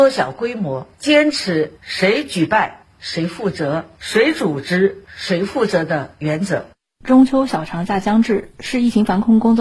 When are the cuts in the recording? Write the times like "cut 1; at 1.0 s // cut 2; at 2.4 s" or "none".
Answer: none